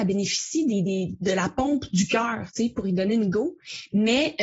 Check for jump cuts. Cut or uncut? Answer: uncut